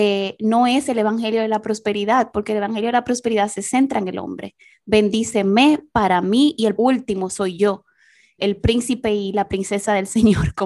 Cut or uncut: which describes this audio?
cut